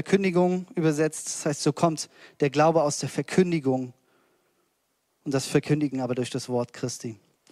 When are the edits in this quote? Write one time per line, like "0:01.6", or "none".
none